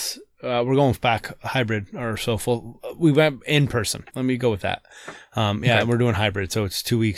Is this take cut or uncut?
cut